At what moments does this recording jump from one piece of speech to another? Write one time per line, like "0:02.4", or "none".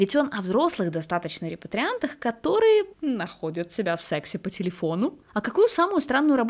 0:02.9
0:05.2